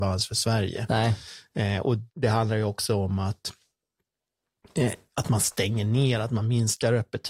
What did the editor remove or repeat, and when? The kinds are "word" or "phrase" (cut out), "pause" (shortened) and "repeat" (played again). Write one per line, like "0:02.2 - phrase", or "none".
0:02.1 - pause